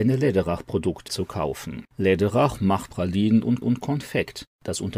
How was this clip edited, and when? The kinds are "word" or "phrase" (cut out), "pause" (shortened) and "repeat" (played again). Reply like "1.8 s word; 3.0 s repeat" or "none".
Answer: 1.1 s word; 1.9 s pause; 2.9 s word; 3.6 s repeat